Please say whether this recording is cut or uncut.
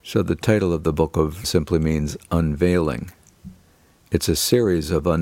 cut